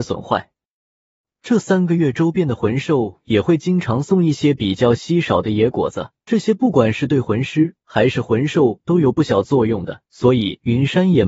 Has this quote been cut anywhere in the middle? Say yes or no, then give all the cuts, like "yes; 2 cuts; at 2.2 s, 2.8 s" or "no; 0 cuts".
yes; 2 cuts; at 6.2 s, 10.1 s